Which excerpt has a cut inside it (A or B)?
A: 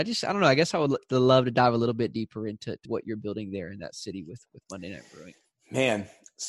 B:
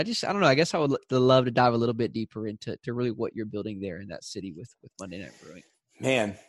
A